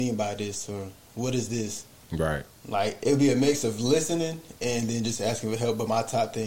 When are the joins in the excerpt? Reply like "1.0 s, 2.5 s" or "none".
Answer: 2.5 s